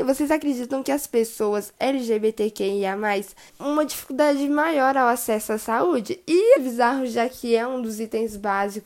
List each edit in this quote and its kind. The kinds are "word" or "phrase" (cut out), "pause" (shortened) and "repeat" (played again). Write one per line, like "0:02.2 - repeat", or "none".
0:03.5 - word
0:06.6 - phrase